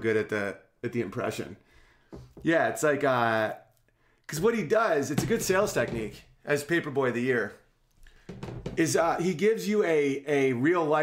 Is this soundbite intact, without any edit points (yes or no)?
yes